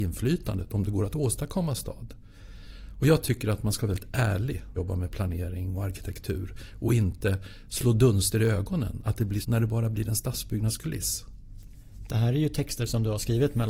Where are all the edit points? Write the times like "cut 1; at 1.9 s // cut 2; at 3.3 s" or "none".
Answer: cut 1; at 4.8 s // cut 2; at 9.4 s